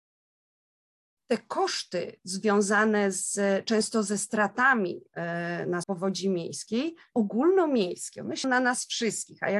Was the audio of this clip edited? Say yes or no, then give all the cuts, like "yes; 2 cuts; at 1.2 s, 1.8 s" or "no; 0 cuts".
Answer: yes; 3 cuts; at 5.8 s, 7.1 s, 8.4 s